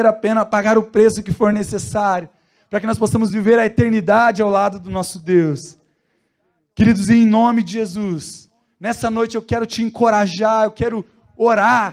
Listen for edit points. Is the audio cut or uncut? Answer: uncut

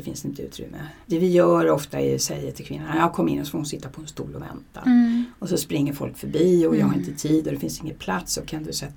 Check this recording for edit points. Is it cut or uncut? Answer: cut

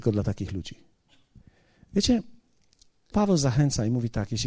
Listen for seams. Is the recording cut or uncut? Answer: cut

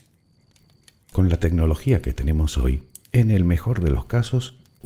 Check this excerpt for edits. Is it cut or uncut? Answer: uncut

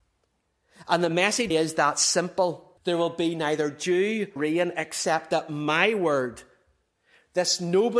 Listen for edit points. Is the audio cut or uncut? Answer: cut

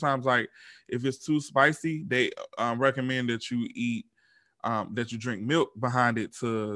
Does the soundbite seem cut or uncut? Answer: uncut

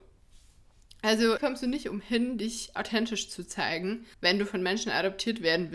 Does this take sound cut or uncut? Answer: cut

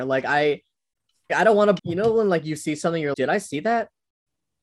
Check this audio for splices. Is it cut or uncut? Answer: cut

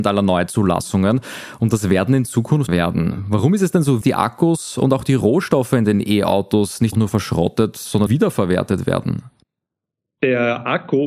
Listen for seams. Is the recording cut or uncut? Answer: cut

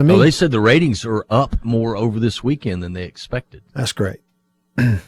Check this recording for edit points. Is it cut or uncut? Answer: uncut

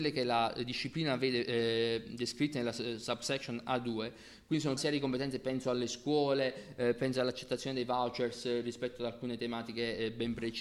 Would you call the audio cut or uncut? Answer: cut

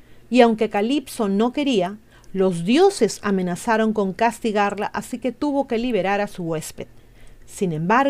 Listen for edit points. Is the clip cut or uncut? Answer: uncut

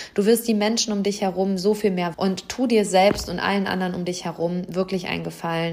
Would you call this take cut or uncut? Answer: cut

